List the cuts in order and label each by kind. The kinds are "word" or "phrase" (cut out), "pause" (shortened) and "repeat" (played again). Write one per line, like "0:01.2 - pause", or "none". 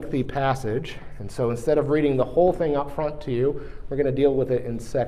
none